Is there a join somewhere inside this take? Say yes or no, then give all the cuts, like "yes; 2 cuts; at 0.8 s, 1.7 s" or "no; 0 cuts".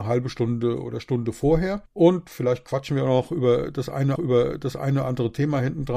yes; 2 cuts; at 1.9 s, 4.2 s